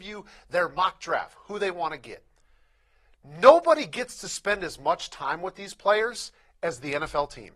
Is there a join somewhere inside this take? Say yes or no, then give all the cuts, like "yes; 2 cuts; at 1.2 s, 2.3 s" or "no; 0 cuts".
no; 0 cuts